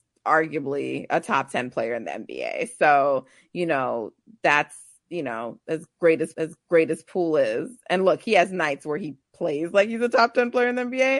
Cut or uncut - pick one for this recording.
cut